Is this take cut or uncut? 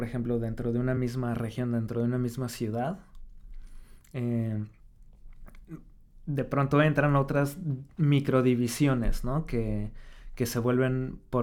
uncut